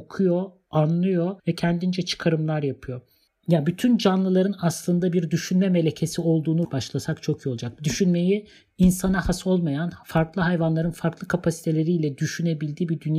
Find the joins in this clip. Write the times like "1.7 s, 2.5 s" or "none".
1.4 s, 6.6 s